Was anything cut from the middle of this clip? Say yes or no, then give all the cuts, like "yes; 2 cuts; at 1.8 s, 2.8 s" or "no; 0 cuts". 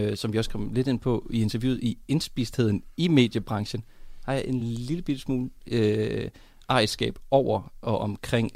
no; 0 cuts